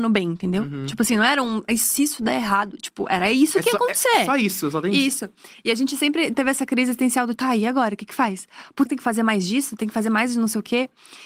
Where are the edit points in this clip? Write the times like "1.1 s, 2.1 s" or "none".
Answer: 7.4 s, 8.9 s

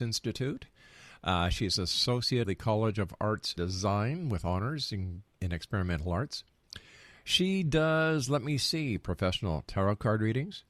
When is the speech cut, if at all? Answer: 2.4 s, 3.6 s, 5.3 s

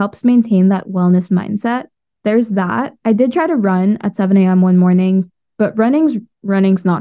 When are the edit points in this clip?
none

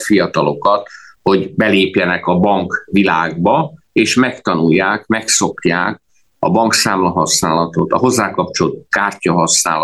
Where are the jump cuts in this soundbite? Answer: none

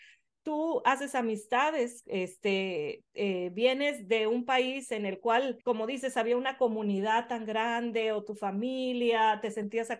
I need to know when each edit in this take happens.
5.6 s

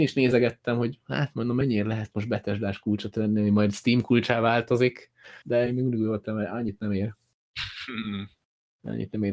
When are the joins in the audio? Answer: 5.4 s

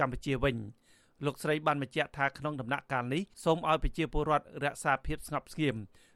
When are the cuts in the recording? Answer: 3.3 s

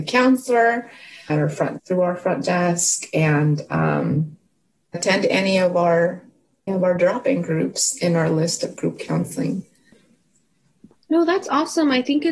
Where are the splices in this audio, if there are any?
1.3 s, 1.8 s, 4.9 s, 6.7 s

